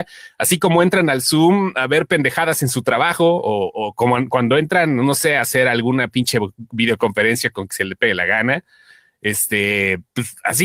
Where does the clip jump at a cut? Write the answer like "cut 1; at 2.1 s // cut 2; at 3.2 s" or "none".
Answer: none